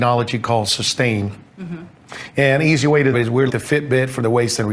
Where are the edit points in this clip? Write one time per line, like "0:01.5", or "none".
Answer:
0:03.1
0:03.5

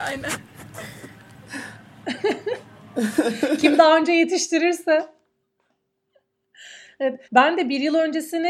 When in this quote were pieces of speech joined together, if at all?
0:07.2

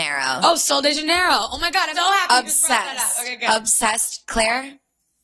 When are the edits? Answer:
0:01.9

